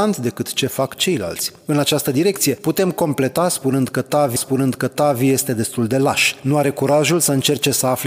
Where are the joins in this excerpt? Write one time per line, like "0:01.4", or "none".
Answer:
0:04.4